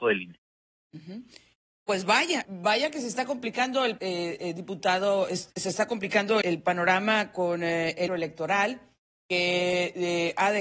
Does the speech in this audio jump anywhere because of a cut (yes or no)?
yes